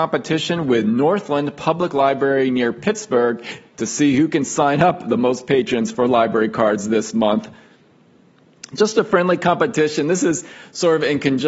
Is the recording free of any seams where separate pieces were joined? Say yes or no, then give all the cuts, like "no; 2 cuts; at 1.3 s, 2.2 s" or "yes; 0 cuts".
yes; 0 cuts